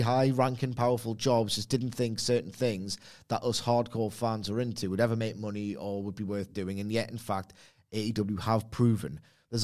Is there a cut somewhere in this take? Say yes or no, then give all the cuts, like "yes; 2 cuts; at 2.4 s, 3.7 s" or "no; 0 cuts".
no; 0 cuts